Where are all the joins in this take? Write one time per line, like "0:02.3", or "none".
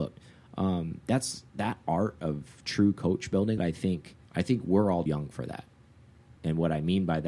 0:01.5
0:03.6
0:04.2
0:05.1
0:06.4